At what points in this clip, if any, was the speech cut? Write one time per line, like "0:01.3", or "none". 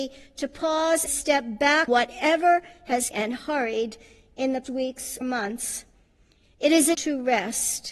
0:01.1
0:01.9
0:03.1
0:04.6
0:05.2
0:06.9